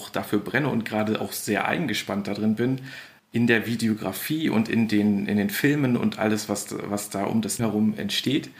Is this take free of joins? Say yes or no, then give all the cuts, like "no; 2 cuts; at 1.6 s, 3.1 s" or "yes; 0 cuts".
no; 1 cut; at 7.6 s